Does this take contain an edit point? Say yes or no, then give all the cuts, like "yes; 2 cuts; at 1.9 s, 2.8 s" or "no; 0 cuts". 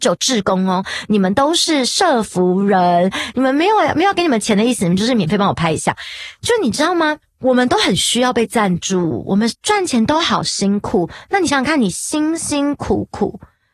yes; 1 cut; at 7.2 s